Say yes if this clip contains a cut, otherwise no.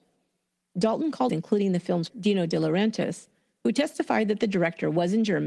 yes